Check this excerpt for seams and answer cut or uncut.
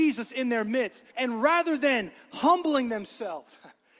cut